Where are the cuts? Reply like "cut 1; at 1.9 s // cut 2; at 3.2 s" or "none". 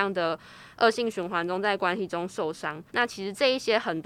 cut 1; at 2.9 s